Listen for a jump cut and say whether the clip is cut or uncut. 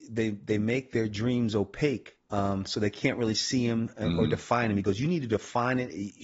cut